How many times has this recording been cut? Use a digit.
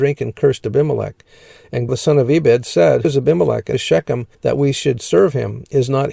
4